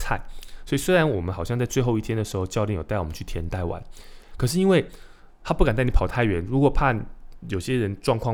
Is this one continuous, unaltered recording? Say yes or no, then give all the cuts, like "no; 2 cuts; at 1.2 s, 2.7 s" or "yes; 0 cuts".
yes; 0 cuts